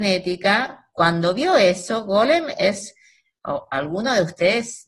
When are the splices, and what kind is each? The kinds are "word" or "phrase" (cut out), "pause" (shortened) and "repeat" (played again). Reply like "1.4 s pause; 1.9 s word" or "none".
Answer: none